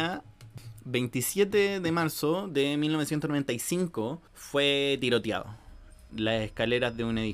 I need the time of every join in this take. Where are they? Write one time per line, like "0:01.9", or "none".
0:04.3
0:06.1